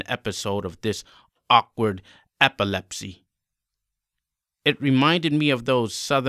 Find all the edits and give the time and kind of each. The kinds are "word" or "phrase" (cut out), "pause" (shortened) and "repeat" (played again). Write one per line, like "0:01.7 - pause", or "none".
none